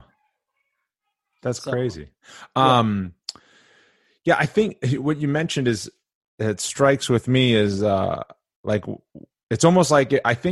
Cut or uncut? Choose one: uncut